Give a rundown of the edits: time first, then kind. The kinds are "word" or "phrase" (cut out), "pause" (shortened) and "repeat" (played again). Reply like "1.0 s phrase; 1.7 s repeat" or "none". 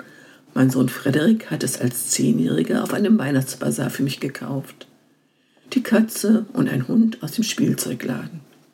none